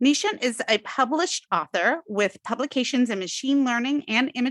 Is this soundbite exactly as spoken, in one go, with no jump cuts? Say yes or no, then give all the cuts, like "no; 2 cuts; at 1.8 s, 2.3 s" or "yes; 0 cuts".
yes; 0 cuts